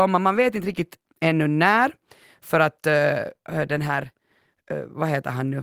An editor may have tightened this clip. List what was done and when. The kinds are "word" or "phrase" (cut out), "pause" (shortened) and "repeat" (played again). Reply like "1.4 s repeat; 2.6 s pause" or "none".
none